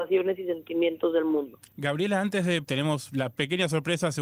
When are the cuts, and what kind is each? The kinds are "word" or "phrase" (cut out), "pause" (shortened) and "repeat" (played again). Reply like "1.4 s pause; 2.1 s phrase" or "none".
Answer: 1.7 s pause; 2.6 s word